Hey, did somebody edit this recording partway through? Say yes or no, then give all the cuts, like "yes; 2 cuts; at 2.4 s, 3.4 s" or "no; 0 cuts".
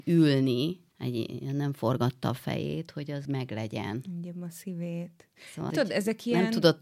yes; 3 cuts; at 0.9 s, 3.2 s, 5.7 s